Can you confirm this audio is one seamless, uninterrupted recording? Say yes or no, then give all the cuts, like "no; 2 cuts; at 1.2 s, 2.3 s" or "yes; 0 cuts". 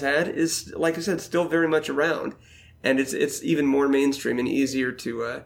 yes; 0 cuts